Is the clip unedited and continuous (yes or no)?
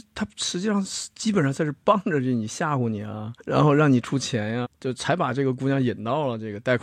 no